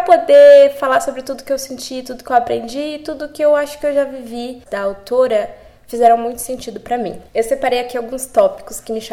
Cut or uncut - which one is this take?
cut